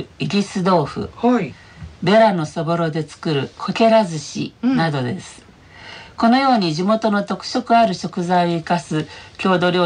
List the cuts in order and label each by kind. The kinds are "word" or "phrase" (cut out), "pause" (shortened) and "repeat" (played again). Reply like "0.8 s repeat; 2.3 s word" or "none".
3.5 s pause